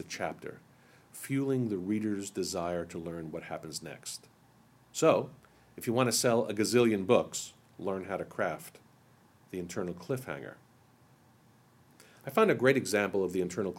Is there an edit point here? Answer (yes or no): no